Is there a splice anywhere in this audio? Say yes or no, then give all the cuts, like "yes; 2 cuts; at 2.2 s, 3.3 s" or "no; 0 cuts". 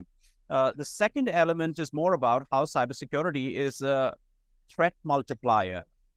no; 0 cuts